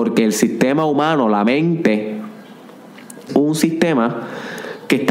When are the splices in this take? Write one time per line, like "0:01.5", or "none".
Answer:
0:03.3